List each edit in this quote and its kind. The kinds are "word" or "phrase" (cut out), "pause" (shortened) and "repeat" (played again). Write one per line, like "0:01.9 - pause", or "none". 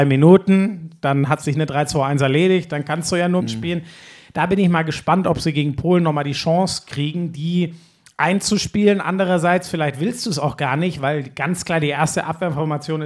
0:03.4 - phrase

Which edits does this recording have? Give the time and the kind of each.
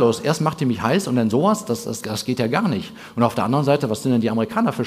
0:02.0 - word

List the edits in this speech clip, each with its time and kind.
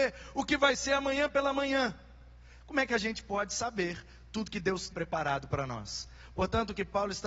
0:04.9 - word

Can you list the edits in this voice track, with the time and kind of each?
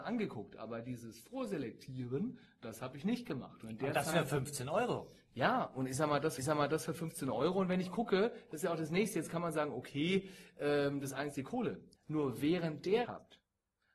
0:06.4 - repeat
0:12.0 - pause
0:13.0 - word

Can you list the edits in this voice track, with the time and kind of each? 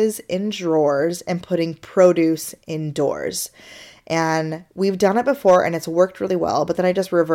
none

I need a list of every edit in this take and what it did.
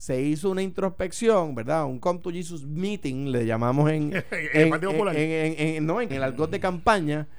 0:06.1 - word

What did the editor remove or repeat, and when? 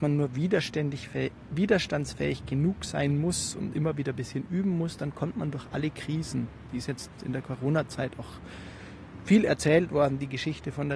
none

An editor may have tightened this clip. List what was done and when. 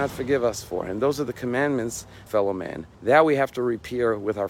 0:02.3 - phrase
0:02.9 - pause

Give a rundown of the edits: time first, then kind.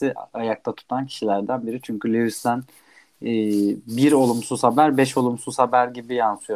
none

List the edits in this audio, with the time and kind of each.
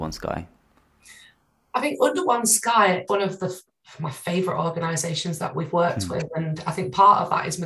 0:03.1 - word

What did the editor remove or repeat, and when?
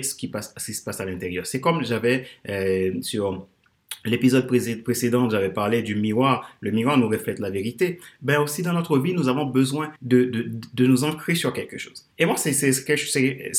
0:10.0 - pause
0:12.1 - pause

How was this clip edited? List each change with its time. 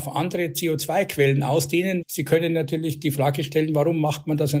0:02.0 - word

